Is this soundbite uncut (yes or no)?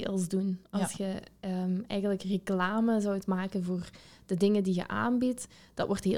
yes